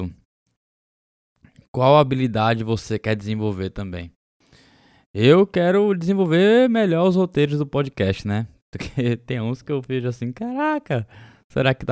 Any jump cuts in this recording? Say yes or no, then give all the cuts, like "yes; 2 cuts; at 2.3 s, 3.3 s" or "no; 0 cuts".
no; 0 cuts